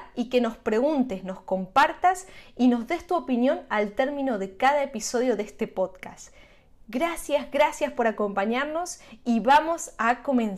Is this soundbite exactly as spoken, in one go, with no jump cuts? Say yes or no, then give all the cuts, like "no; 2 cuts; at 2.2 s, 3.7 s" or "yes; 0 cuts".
yes; 0 cuts